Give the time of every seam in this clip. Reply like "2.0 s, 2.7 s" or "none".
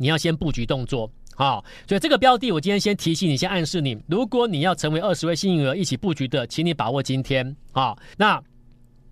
8.1 s